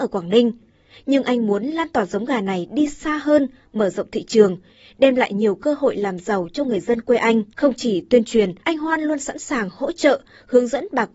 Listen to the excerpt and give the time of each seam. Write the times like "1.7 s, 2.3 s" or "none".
7.5 s, 8.6 s